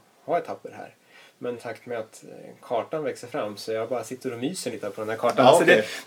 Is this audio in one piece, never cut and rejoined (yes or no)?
no